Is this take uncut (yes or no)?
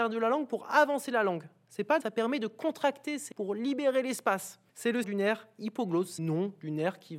no